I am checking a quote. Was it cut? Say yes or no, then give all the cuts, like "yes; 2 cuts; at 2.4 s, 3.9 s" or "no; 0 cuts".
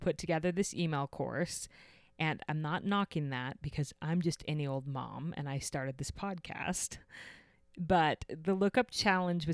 no; 0 cuts